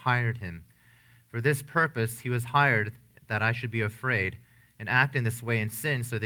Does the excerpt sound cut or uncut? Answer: uncut